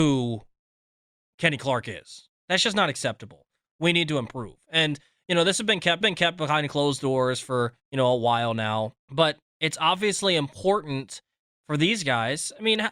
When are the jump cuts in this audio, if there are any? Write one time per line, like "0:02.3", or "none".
0:06.0
0:07.8
0:09.0